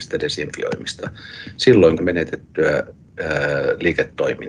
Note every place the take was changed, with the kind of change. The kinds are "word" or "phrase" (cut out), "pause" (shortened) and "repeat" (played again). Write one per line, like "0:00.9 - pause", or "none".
0:02.0 - word